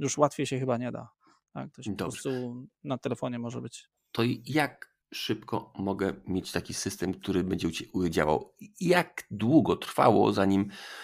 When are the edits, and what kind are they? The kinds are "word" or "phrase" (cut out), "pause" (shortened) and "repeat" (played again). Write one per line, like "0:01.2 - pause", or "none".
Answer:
0:04.0 - pause
0:05.0 - pause